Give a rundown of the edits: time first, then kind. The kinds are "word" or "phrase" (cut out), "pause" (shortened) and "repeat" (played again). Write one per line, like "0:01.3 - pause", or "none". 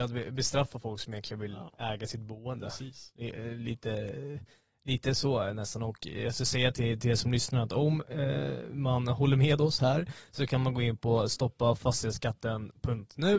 none